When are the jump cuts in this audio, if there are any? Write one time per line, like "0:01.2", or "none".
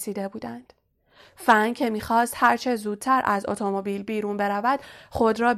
none

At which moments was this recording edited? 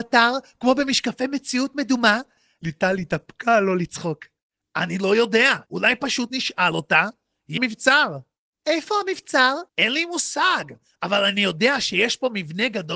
0:05.7
0:07.6
0:09.7

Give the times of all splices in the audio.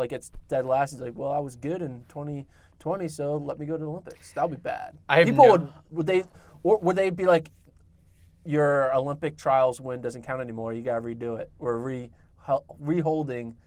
0:05.0

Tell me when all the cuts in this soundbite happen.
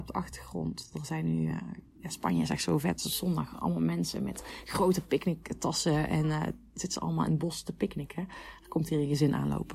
none

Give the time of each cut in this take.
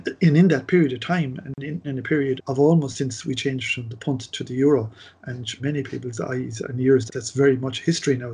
0:01.8
0:02.4
0:05.6
0:07.1

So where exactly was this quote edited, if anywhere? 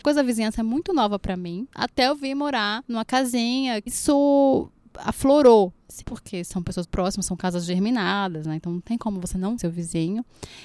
0:03.9
0:06.0
0:06.8
0:09.6

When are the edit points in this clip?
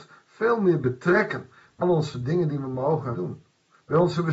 0:01.8
0:03.1

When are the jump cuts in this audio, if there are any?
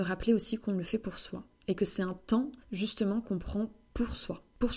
0:02.6

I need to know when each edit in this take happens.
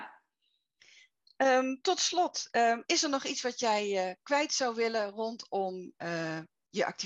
none

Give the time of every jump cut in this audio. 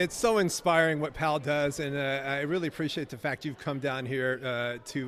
none

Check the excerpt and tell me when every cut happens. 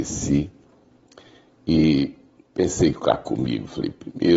none

